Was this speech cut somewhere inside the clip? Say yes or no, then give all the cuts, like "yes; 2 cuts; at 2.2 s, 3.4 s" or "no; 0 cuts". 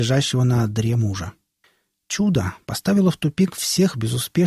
yes; 1 cut; at 1.6 s